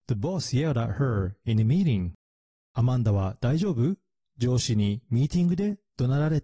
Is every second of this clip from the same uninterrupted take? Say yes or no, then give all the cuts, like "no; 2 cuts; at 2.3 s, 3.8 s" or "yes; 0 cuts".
yes; 0 cuts